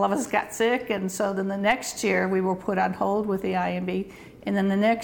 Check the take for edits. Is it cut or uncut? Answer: uncut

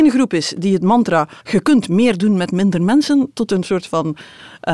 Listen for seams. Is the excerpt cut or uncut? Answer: cut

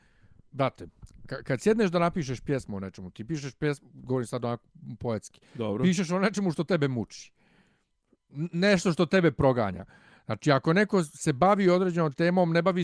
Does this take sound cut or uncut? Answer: uncut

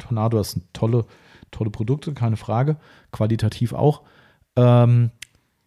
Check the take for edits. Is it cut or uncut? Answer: uncut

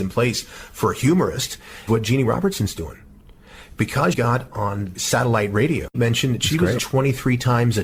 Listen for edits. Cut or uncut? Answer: cut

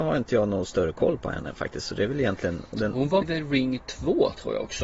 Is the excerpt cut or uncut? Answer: cut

